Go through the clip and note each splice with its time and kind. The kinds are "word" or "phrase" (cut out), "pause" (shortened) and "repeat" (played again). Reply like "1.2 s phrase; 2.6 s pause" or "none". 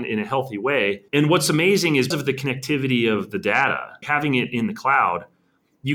1.1 s pause; 2.1 s word; 4.0 s word

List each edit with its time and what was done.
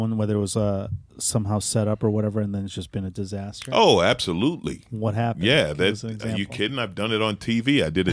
none

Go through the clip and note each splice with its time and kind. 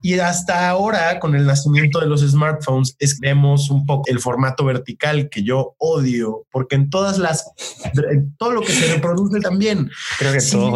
3.2 s word; 4.0 s word; 9.4 s word

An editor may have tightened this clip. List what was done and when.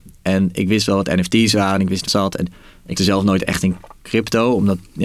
2.1 s phrase; 3.0 s word

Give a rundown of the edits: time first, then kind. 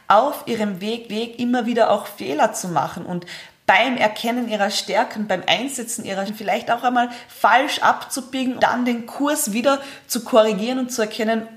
1.1 s repeat; 6.3 s word; 8.6 s word

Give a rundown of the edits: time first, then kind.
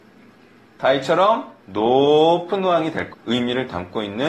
1.6 s pause; 3.1 s word

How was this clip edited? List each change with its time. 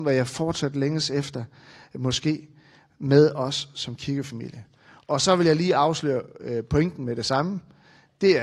none

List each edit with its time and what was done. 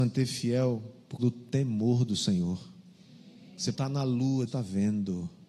1.2 s word; 3.7 s word; 4.5 s word

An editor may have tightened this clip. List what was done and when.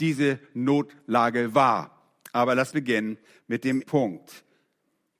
2.7 s word; 3.3 s pause; 3.8 s word

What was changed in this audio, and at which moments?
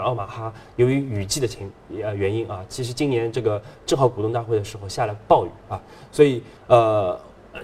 6.6 s pause

